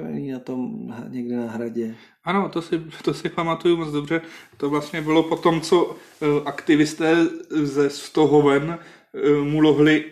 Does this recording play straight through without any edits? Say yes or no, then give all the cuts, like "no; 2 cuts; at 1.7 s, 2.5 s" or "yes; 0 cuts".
yes; 0 cuts